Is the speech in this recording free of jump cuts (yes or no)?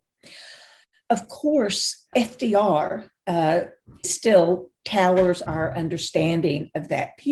no